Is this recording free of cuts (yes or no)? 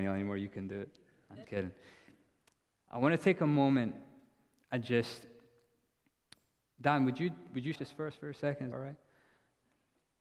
no